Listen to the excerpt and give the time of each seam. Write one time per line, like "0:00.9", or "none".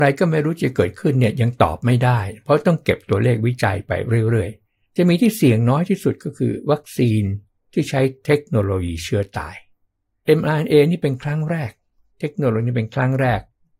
none